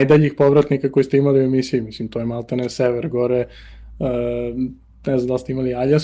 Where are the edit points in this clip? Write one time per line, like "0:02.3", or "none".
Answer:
none

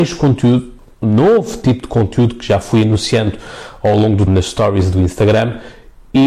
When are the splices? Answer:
0:04.3

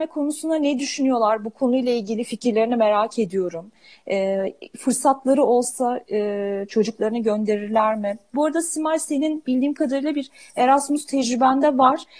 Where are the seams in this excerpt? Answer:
none

